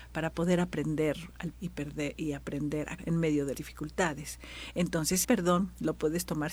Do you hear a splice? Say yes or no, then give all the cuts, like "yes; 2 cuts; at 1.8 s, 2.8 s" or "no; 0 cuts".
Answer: yes; 4 cuts; at 1.5 s, 3.0 s, 3.5 s, 5.2 s